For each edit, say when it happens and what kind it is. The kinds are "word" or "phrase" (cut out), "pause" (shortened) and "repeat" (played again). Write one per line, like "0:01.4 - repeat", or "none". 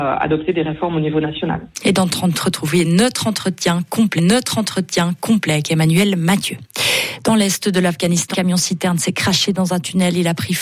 0:02.3 - word
0:04.2 - repeat
0:08.3 - word